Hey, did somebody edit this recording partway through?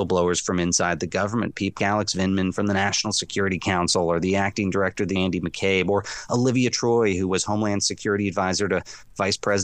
yes; 2 cuts; at 1.8 s, 5.1 s

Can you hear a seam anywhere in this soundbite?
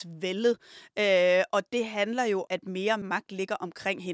yes; 2 cuts; at 2.5 s, 3.0 s

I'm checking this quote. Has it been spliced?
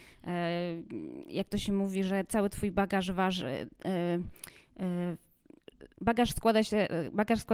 yes; 1 cut; at 5.9 s

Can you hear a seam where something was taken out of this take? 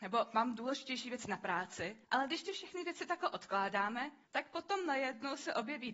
yes; 2 cuts; at 2.0 s, 4.2 s

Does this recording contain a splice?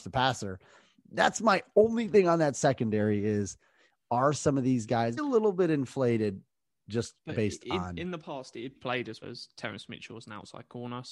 yes; 3 cuts; at 5.2 s, 8.7 s, 9.2 s

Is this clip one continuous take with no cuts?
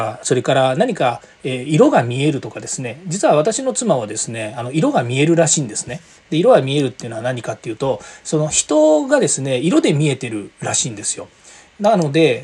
yes; 0 cuts

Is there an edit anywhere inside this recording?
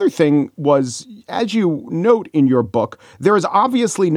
no; 0 cuts

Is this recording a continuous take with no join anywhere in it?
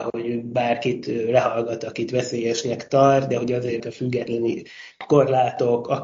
no; 1 cut; at 3.8 s

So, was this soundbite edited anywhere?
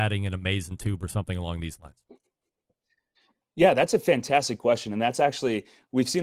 no; 0 cuts

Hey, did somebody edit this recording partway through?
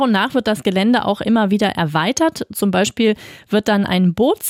no; 0 cuts

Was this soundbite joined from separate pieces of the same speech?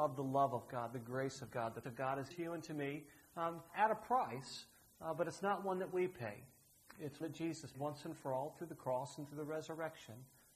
yes; 5 cuts; at 1.8 s, 2.3 s, 3.7 s, 7.2 s, 7.7 s

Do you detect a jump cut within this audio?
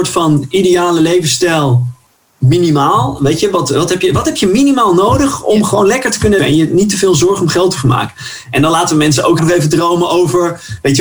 yes; 2 cuts; at 6.4 s, 9.4 s

